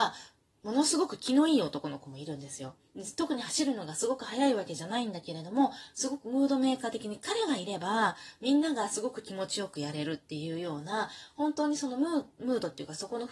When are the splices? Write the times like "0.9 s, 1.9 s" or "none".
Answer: none